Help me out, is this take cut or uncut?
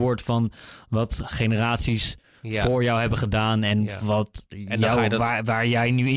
uncut